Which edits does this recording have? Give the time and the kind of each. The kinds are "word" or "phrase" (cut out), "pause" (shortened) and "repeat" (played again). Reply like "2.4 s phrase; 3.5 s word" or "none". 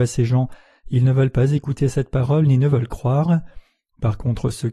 none